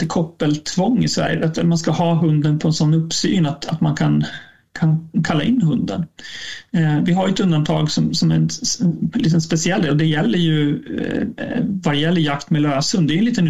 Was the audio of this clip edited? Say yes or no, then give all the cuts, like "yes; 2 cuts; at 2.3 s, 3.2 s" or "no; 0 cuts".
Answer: no; 0 cuts